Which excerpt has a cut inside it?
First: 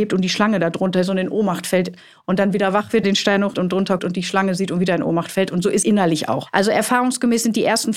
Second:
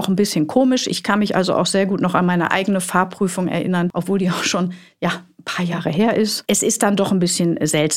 first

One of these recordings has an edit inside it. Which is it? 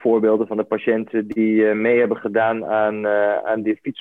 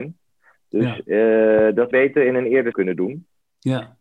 second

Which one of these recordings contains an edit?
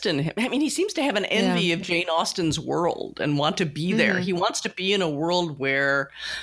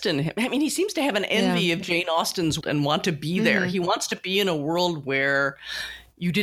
second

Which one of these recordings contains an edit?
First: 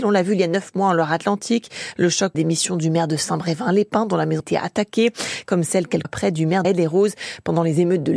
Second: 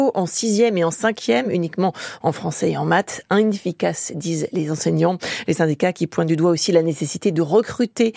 first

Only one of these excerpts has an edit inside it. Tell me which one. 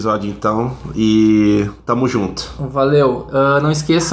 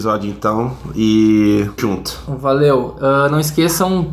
second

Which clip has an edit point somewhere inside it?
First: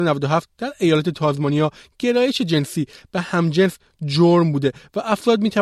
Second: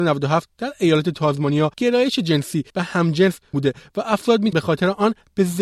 second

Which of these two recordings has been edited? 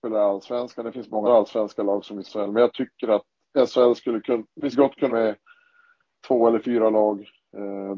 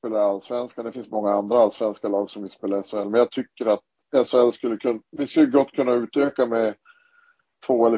first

